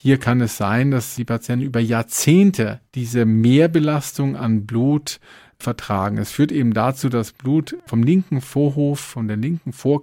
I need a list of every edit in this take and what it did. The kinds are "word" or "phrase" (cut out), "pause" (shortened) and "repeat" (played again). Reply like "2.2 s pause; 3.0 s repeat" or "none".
none

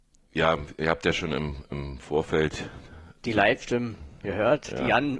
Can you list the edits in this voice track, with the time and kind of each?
none

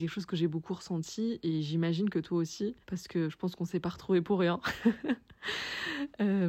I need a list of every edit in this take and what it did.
2.8 s pause

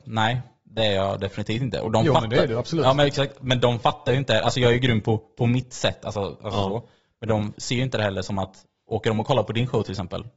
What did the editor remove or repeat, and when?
none

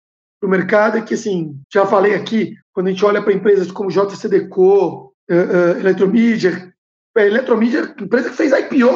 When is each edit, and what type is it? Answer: 1.6 s pause; 2.6 s pause; 5.2 s pause

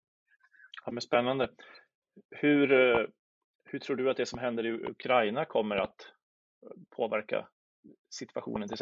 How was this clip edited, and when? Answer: none

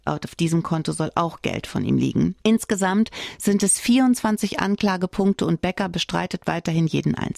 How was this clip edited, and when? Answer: 2.4 s pause

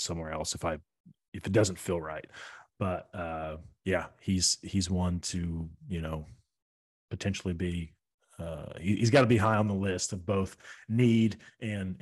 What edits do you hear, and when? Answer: none

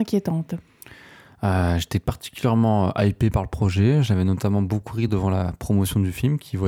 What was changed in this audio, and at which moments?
none

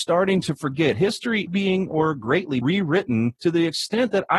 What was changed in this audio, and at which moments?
1.5 s phrase; 2.6 s word; 3.4 s pause

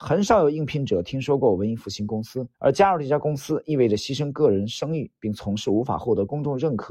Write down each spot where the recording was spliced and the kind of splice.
2.5 s pause

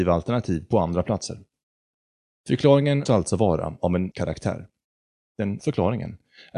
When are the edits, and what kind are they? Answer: 3.1 s word; 4.1 s word; 5.6 s word

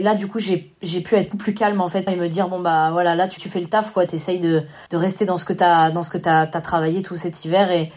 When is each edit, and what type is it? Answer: 1.3 s word; 2.1 s word; 3.4 s word; 4.9 s pause

